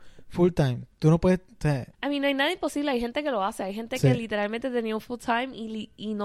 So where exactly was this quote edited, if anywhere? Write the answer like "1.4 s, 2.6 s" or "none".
1.9 s